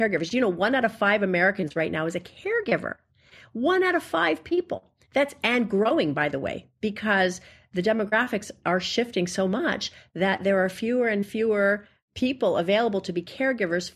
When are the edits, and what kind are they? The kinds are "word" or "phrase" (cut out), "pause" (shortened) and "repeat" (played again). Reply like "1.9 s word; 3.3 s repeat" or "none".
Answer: none